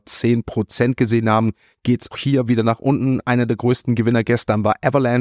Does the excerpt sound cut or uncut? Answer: cut